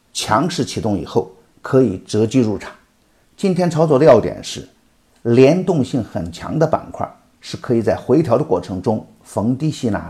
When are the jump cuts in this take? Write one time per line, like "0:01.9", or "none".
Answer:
none